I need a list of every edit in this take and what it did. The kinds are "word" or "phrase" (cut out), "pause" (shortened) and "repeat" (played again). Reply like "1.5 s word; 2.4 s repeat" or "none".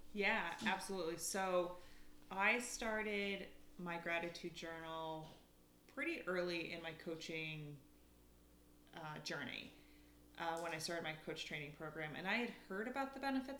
none